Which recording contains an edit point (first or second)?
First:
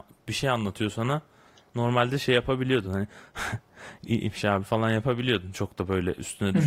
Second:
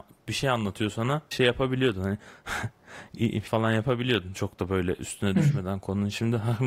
second